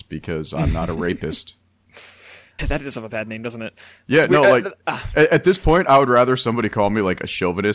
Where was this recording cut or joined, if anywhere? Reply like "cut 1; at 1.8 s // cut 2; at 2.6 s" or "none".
cut 1; at 2.6 s